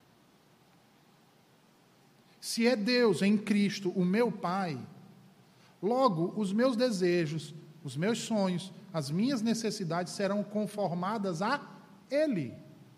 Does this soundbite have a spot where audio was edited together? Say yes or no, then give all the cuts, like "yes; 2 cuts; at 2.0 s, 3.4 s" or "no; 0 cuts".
no; 0 cuts